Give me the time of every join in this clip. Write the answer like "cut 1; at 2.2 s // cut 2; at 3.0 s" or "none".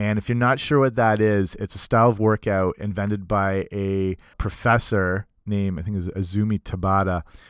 cut 1; at 4.3 s